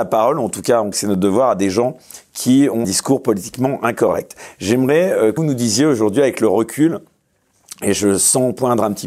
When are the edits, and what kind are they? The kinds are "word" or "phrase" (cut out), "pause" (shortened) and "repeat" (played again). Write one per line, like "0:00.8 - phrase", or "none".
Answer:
0:00.9 - word
0:02.8 - word
0:05.4 - word